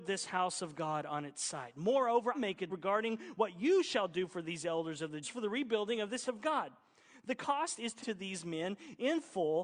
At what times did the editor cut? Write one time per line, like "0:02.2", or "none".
0:02.3
0:02.7
0:05.2
0:06.3
0:08.0